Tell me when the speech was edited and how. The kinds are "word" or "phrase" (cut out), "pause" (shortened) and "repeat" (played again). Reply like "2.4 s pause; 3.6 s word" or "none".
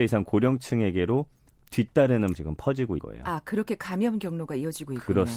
2.3 s word; 3.0 s word

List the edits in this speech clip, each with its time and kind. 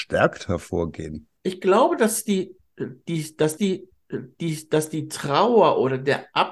1.4 s pause; 3.6 s repeat

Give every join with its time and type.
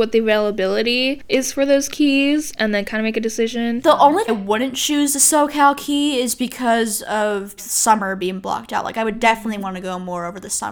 4.3 s phrase; 7.6 s word

